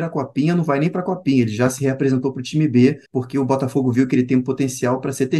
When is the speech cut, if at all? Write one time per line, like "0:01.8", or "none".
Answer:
0:03.1

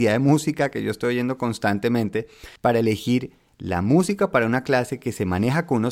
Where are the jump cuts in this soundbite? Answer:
0:02.6

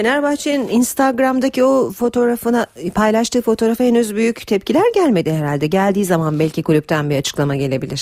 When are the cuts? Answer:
none

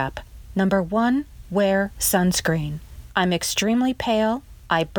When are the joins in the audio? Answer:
0:01.4

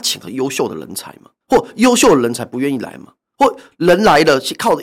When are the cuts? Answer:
0:01.4

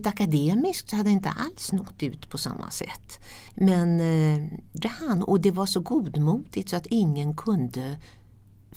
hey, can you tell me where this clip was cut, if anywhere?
0:03.5
0:04.8

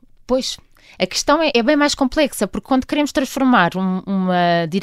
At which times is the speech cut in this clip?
0:01.5

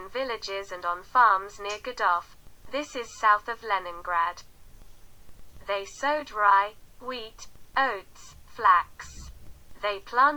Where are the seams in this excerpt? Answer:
none

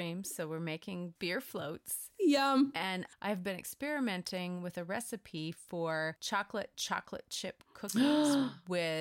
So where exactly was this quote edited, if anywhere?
none

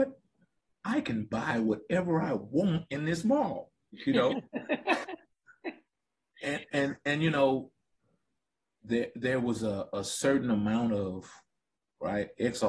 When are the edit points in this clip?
none

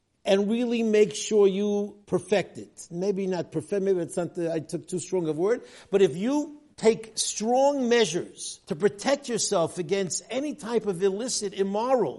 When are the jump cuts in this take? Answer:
0:02.0
0:06.7
0:08.6

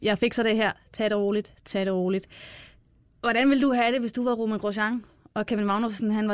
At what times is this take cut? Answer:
none

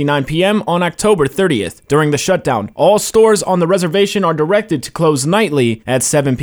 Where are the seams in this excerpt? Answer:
none

